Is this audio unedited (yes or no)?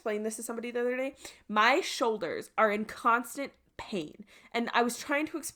yes